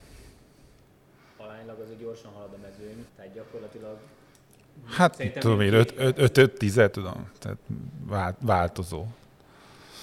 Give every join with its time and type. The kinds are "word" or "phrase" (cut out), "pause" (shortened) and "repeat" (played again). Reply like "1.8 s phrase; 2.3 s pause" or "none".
3.1 s pause; 6.9 s word